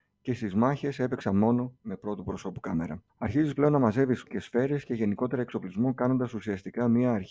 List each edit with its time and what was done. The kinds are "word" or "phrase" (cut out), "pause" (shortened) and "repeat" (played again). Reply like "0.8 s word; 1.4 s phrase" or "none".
3.1 s pause; 4.3 s word